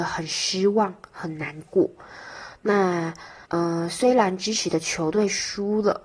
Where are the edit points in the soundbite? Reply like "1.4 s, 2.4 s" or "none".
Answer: 3.5 s